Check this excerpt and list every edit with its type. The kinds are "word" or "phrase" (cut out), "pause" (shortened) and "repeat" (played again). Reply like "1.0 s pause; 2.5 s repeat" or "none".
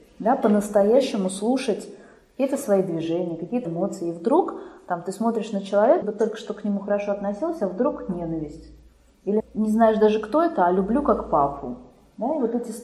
3.6 s word; 6.0 s word; 9.4 s word

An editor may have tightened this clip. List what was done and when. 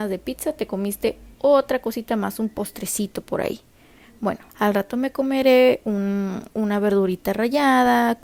1.3 s pause; 4.5 s pause; 6.5 s pause

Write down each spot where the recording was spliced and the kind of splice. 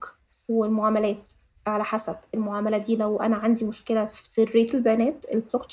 none

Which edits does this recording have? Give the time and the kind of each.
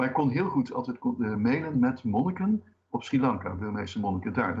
none

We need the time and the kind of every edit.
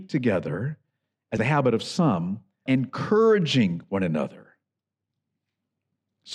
1.4 s word; 2.7 s word

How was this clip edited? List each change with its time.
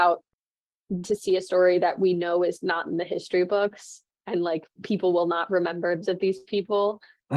1.0 s word; 4.8 s word; 6.0 s word

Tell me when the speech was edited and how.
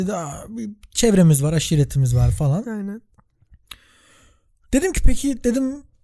none

